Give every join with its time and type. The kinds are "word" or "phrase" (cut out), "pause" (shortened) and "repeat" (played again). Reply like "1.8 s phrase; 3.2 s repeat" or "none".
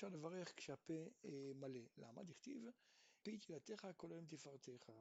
3.2 s word